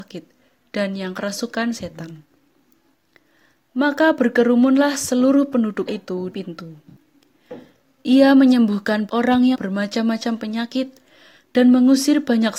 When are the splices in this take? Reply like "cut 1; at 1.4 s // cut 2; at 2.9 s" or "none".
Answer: cut 1; at 5.9 s // cut 2; at 6.3 s // cut 3; at 9.1 s // cut 4; at 9.5 s